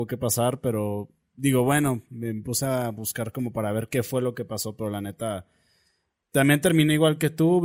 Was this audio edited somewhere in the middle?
no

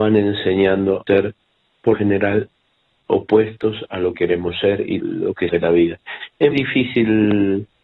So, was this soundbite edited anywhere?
yes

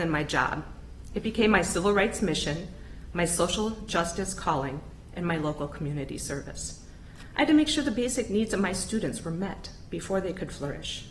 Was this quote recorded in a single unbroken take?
yes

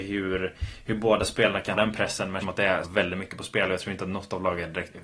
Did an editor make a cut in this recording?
yes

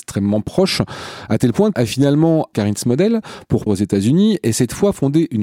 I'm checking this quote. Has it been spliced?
yes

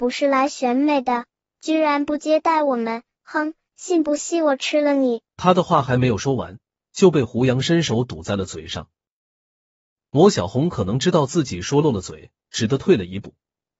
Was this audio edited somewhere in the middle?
yes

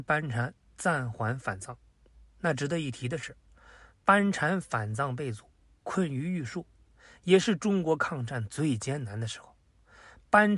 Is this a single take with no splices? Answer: yes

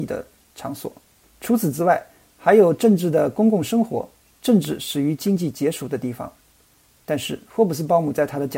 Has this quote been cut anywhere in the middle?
yes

